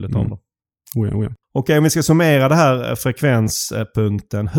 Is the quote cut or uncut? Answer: cut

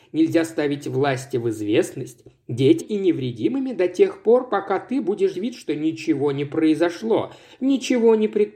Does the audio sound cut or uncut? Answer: cut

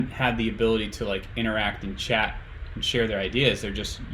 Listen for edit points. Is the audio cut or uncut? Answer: uncut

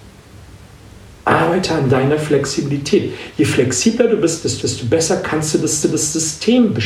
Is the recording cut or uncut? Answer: cut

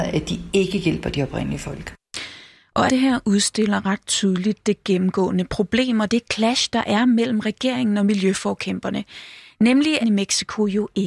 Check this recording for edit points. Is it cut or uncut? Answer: cut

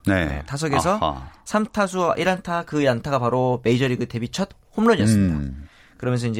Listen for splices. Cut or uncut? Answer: uncut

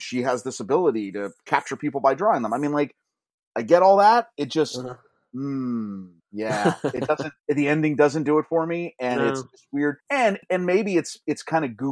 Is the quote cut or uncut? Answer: cut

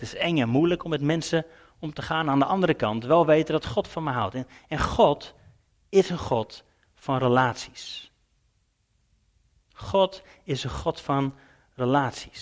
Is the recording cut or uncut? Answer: uncut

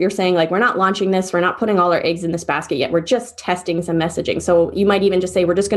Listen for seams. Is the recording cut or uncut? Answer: uncut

